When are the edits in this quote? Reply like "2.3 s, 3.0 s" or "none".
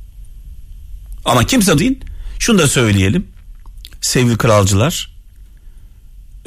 1.8 s